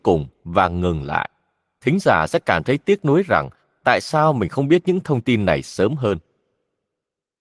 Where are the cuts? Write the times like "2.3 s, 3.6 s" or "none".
none

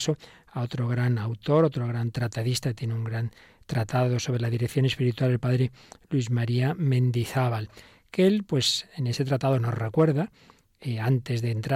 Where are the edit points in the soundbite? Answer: none

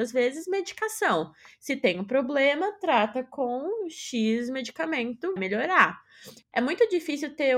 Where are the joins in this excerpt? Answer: 5.4 s

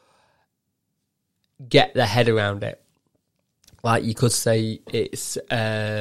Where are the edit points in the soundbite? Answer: none

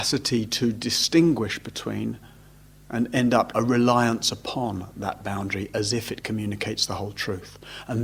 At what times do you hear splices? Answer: 3.5 s

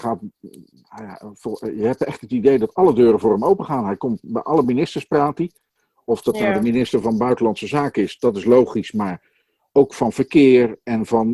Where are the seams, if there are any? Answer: none

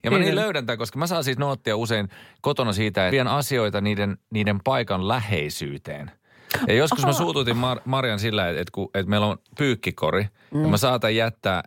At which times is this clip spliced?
3.1 s

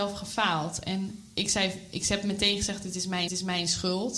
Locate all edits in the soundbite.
3.3 s

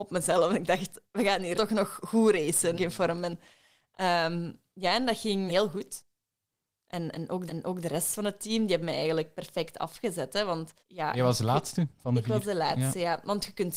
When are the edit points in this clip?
1.5 s, 2.7 s, 5.5 s, 7.5 s, 10.8 s

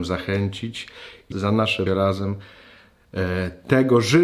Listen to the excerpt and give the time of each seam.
1.3 s, 1.9 s

